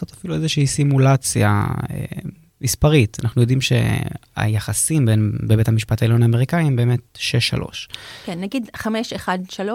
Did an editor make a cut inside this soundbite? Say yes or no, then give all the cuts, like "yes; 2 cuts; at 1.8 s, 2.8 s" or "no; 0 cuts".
no; 0 cuts